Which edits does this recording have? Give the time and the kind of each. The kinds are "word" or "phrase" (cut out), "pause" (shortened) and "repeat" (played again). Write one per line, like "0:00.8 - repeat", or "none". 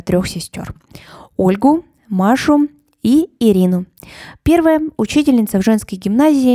none

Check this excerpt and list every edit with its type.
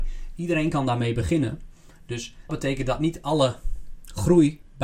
0:02.5 - word

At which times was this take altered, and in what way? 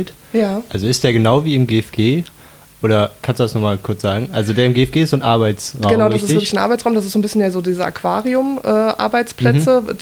none

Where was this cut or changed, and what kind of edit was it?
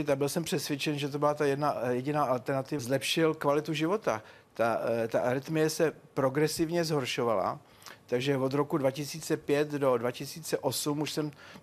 0:02.8 - phrase

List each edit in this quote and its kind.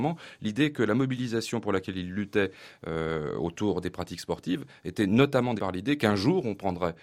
0:05.6 - word

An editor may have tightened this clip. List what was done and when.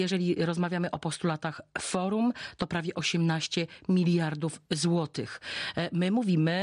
none

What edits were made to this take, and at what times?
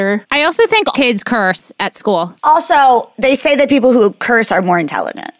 0:00.9 - word

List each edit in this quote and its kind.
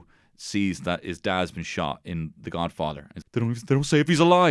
0:03.2 - word

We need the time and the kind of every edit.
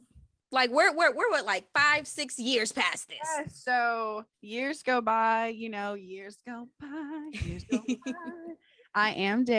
0:04.3 - pause

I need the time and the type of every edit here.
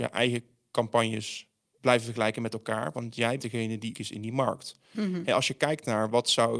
0:01.8 - word
0:03.4 - word
0:03.9 - word

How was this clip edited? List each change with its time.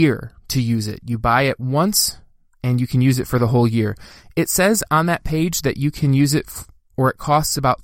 none

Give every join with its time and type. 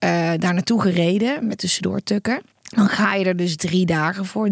0:01.6 - phrase
0:02.5 - pause

